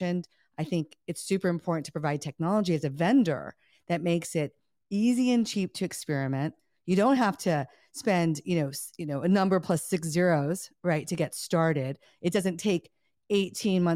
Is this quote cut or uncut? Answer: uncut